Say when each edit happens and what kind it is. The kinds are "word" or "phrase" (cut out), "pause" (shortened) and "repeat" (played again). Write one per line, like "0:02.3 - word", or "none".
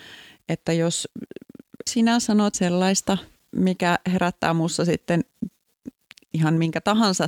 0:01.9 - word
0:02.5 - word